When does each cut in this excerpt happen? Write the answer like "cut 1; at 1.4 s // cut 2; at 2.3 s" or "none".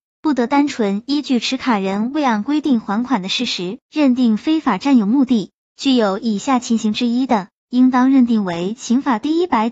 cut 1; at 3.8 s